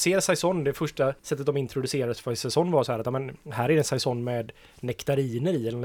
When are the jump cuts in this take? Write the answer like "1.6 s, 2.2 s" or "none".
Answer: 1.2 s, 3.4 s